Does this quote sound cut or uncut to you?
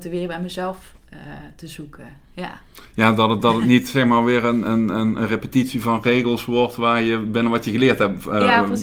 uncut